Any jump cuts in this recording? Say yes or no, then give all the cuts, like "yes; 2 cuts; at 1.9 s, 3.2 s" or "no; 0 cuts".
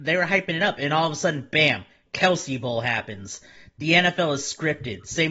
no; 0 cuts